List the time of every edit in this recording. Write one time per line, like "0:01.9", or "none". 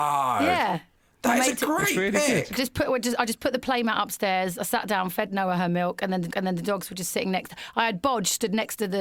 0:06.3